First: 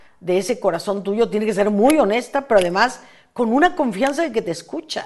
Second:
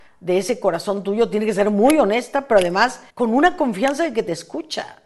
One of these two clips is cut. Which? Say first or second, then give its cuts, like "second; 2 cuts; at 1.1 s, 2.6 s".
second; 1 cut; at 3.1 s